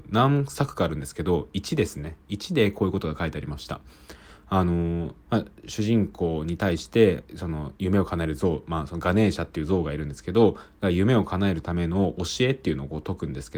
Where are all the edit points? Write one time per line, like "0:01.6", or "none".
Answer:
0:05.2
0:07.8